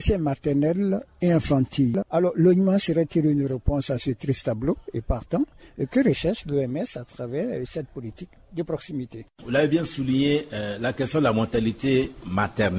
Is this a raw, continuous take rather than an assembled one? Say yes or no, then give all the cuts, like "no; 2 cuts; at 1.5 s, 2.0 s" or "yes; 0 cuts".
yes; 0 cuts